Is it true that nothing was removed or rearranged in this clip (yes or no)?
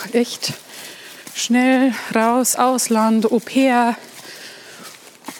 no